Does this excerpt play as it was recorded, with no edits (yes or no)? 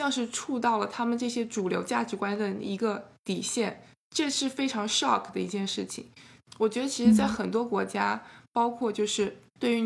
yes